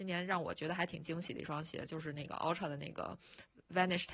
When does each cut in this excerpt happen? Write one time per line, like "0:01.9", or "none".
none

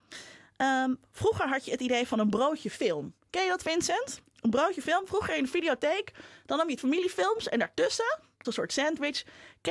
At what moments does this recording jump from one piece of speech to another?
0:04.3
0:06.8
0:08.4

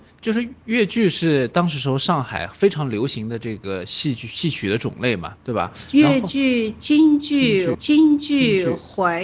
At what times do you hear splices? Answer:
0:07.7

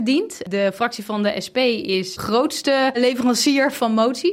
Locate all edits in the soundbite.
0:02.2
0:02.9

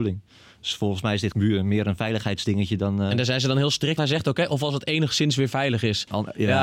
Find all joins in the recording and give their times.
0:01.3
0:04.0

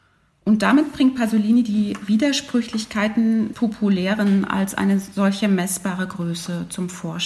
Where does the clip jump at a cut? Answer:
0:03.5

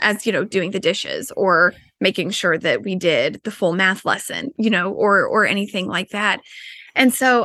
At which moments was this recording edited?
none

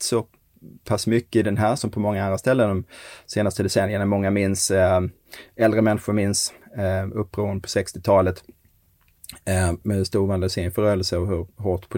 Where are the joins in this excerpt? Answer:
0:01.8
0:09.8

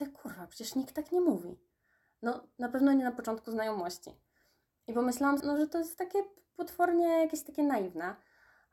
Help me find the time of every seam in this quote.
0:05.4

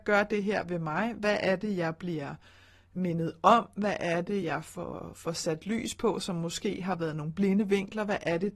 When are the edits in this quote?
none

